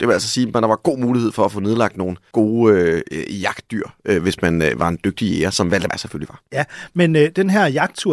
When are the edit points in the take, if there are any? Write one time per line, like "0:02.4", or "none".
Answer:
0:02.3
0:05.9